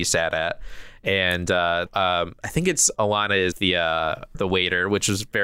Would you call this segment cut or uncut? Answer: cut